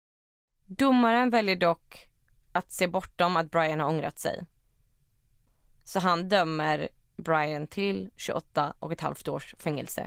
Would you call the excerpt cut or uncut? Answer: uncut